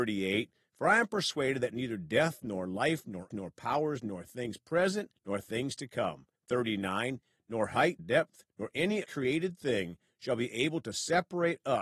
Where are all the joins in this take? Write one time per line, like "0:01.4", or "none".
0:03.3
0:05.1
0:06.4
0:08.0
0:08.5
0:09.0